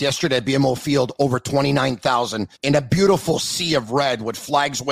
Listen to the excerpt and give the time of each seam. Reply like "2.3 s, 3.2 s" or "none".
2.5 s